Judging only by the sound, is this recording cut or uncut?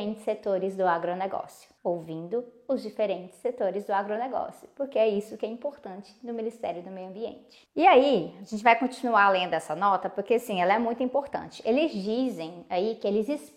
uncut